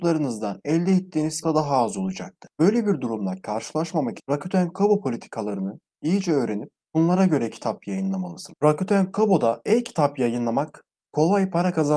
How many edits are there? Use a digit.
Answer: 2